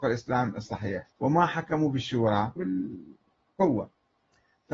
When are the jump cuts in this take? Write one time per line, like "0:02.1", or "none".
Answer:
0:01.1
0:02.6